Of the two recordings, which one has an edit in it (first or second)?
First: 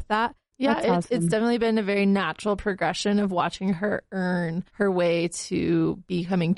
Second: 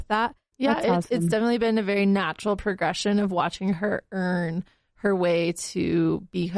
first